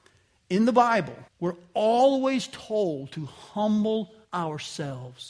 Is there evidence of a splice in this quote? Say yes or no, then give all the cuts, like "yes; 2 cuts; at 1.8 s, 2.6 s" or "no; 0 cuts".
yes; 2 cuts; at 1.3 s, 4.2 s